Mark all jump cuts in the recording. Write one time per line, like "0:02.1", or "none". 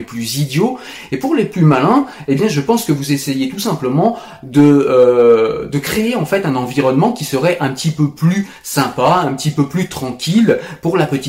none